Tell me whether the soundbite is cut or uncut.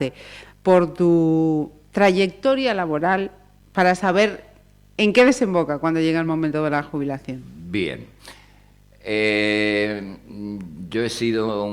uncut